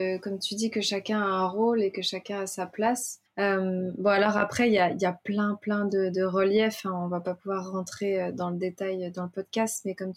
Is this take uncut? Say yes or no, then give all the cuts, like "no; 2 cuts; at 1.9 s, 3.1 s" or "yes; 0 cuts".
no; 1 cut; at 3.3 s